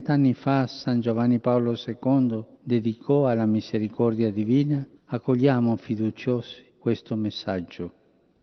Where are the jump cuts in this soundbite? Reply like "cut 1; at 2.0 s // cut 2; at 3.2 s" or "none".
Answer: cut 1; at 2.6 s // cut 2; at 5.0 s // cut 3; at 6.7 s